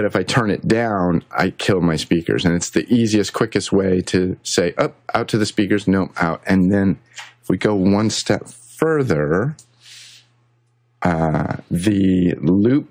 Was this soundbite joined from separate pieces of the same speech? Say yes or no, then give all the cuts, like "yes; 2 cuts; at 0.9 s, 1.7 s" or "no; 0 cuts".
no; 0 cuts